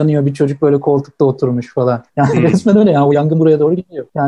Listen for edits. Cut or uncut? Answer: cut